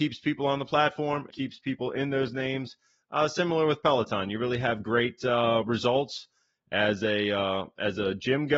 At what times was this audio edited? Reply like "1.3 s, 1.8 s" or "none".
1.3 s